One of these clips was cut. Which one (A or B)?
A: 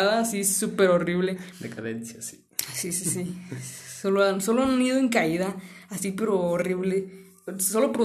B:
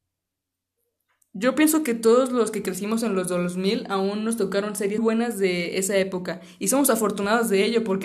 B